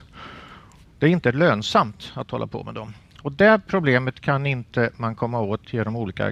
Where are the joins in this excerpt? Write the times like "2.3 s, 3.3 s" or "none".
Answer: none